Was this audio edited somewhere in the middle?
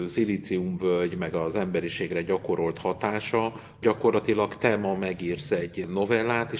yes; 1 cut; at 3.8 s

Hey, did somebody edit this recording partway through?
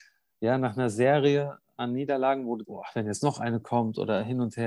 yes; 1 cut; at 2.6 s

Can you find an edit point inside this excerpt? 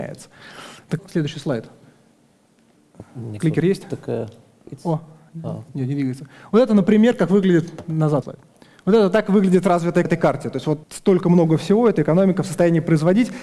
yes; 6 cuts; at 1.0 s, 3.4 s, 5.7 s, 8.2 s, 10.0 s, 10.8 s

